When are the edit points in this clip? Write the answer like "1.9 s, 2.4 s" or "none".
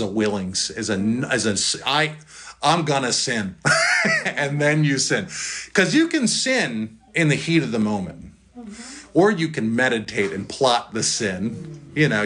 7.1 s